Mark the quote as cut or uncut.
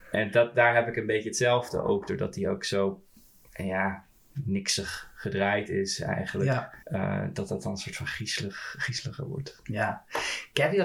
cut